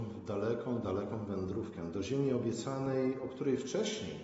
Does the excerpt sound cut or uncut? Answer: uncut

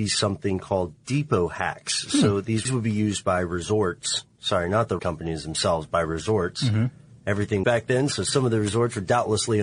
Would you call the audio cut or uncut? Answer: cut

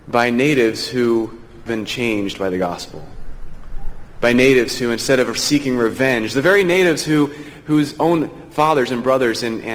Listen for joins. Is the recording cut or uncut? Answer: cut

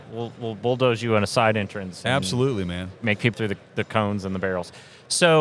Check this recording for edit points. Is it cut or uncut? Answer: cut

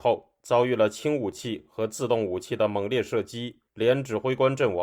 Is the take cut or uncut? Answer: cut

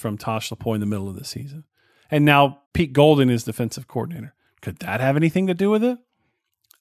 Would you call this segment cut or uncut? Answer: cut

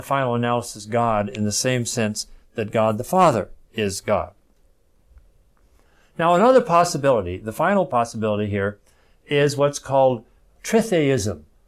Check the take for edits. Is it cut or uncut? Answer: uncut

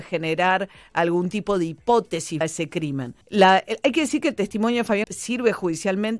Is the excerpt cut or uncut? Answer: cut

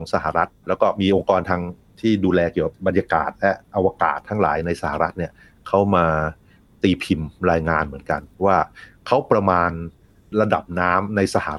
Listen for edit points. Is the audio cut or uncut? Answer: cut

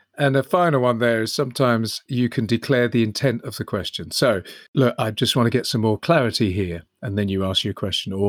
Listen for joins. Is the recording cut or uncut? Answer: cut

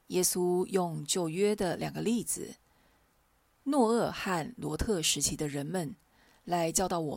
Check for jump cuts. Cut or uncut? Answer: uncut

